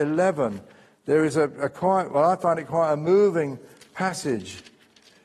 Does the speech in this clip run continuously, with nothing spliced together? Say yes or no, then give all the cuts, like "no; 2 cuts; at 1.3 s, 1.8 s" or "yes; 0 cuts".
yes; 0 cuts